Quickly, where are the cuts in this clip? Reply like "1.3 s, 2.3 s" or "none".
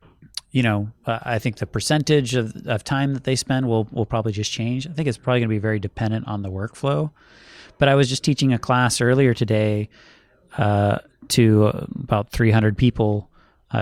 none